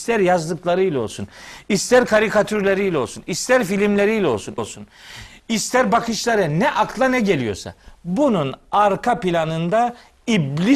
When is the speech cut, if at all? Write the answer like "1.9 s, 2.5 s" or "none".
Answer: 4.6 s